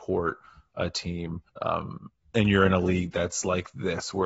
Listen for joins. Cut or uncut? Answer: cut